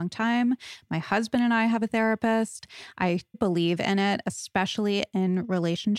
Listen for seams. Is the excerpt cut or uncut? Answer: cut